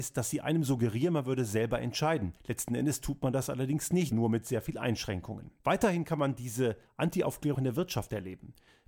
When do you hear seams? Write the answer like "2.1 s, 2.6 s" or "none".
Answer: 2.4 s, 4.1 s, 5.6 s, 7.5 s